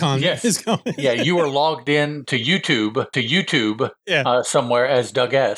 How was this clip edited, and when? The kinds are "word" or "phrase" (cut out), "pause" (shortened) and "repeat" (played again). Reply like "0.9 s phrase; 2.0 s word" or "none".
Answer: 3.1 s repeat